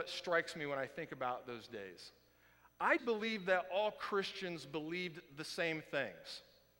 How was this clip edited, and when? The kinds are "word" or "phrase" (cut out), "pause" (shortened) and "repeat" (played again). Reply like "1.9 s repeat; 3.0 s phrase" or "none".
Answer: 3.0 s word